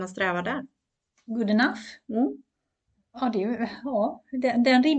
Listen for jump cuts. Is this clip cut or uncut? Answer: uncut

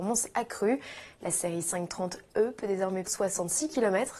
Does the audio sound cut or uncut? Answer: cut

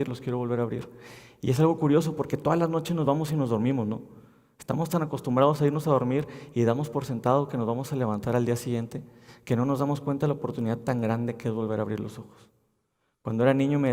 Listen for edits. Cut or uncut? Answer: uncut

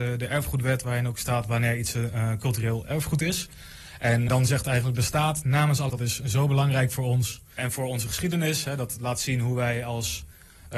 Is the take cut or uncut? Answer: cut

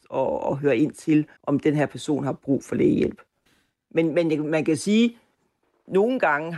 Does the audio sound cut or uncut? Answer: cut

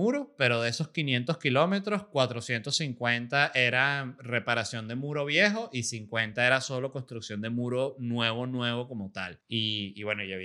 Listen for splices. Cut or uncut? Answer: cut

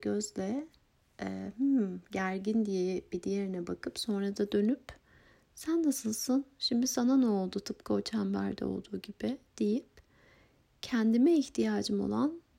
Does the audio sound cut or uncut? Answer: uncut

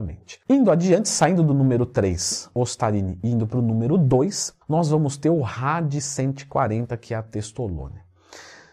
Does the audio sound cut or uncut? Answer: cut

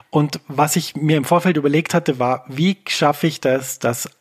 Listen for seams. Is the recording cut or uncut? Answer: uncut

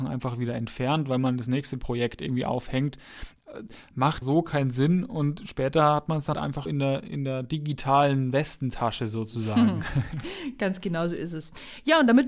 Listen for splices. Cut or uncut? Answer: cut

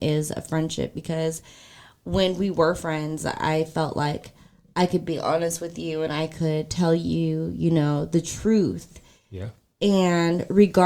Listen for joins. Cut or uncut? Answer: uncut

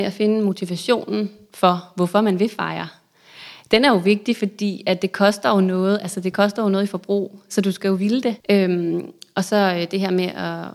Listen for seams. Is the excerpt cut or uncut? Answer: cut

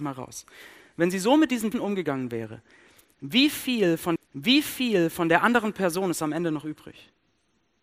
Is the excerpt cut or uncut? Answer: cut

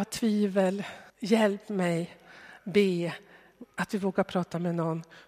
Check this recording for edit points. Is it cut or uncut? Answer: cut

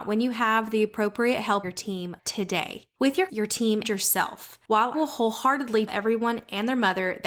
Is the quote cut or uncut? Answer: cut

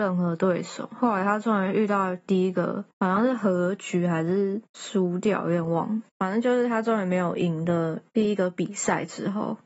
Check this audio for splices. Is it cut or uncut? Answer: cut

